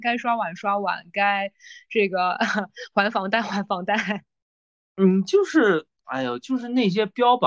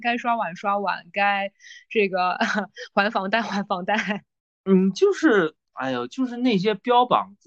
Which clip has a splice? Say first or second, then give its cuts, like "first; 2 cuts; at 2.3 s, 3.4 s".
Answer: second; 1 cut; at 4.4 s